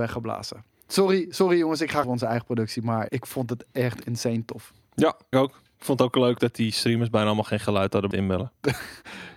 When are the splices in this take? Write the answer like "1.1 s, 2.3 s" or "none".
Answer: 2.0 s, 3.1 s, 5.3 s, 8.1 s